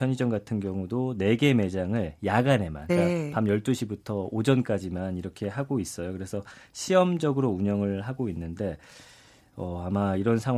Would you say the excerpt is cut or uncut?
cut